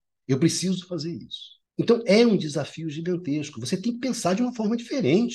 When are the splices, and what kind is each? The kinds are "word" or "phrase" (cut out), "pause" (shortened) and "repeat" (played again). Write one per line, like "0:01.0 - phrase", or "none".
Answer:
0:01.7 - pause